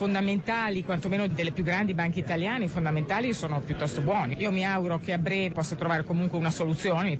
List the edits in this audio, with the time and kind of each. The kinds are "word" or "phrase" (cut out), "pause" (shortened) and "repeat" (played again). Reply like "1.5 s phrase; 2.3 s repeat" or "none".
5.5 s word